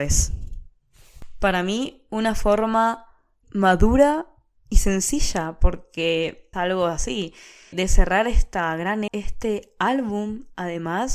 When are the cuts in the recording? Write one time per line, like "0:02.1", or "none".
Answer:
0:03.4
0:06.5
0:07.7
0:09.1